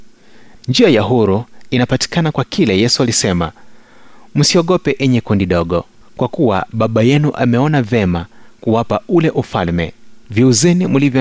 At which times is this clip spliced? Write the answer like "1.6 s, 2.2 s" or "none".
6.0 s, 10.2 s